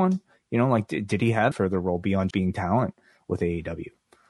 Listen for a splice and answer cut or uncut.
cut